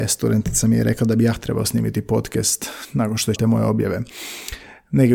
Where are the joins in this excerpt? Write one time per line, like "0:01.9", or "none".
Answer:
0:03.4